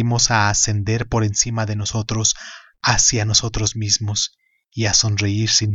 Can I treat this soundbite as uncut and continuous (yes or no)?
yes